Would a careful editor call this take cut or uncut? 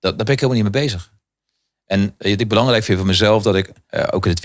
uncut